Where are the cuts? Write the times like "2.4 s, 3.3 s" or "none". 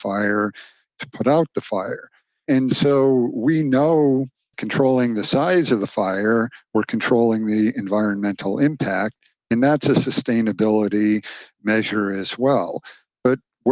4.5 s